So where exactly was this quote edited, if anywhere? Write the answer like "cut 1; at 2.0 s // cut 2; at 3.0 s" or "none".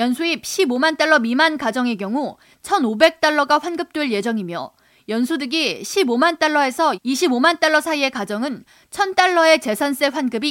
none